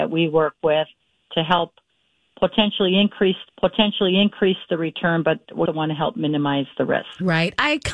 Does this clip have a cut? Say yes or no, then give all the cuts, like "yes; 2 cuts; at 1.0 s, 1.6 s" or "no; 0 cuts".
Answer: yes; 2 cuts; at 3.5 s, 5.7 s